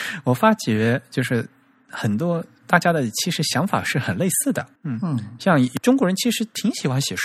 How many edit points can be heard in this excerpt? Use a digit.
1